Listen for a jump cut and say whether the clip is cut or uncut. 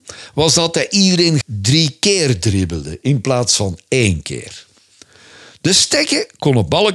cut